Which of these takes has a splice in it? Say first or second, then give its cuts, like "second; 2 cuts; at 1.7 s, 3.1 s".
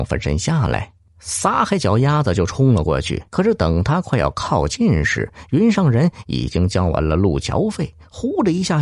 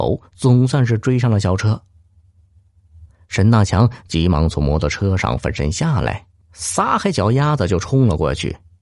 first; 1 cut; at 3.3 s